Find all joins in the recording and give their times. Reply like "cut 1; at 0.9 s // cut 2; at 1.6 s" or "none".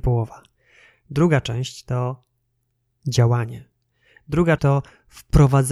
cut 1; at 4.6 s